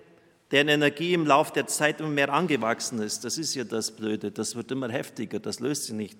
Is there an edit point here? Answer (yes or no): no